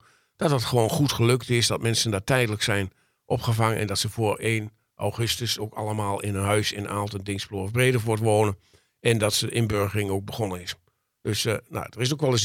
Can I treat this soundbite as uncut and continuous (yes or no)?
yes